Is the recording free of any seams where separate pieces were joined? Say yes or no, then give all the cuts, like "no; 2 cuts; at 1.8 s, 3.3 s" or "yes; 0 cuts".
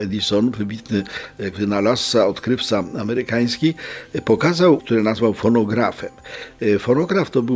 no; 2 cuts; at 1.5 s, 4.8 s